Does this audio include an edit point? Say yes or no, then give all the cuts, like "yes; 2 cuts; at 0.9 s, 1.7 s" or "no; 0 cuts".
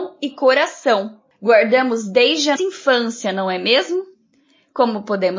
yes; 1 cut; at 2.6 s